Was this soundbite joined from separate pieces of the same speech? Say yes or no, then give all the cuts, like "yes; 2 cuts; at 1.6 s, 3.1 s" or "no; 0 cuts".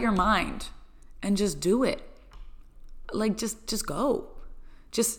no; 0 cuts